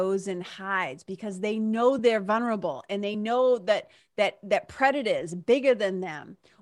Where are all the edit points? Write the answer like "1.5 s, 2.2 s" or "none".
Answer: none